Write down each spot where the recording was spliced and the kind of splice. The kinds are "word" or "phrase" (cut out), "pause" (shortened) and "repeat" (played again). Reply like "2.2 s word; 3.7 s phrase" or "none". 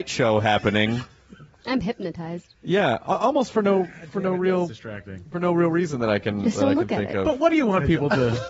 none